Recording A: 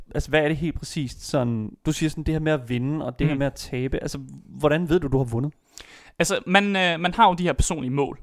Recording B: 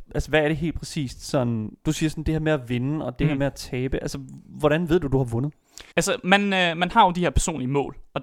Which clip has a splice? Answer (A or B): B